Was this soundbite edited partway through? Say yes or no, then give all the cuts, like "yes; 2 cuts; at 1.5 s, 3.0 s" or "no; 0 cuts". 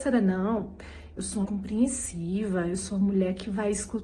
yes; 1 cut; at 1.4 s